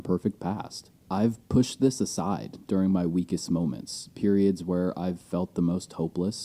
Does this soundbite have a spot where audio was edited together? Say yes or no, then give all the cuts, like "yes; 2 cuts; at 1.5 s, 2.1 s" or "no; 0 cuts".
yes; 1 cut; at 1.0 s